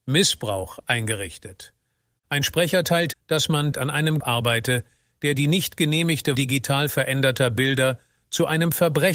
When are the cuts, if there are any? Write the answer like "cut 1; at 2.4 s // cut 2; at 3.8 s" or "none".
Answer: cut 1; at 3.1 s // cut 2; at 3.7 s // cut 3; at 4.2 s // cut 4; at 6.3 s